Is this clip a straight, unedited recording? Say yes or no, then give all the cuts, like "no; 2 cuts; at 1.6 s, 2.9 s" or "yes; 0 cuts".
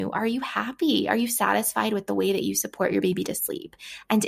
yes; 0 cuts